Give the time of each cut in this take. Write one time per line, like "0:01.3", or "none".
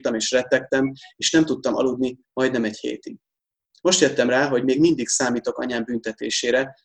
none